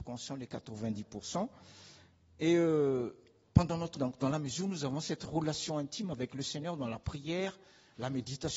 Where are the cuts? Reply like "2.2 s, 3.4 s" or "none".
4.0 s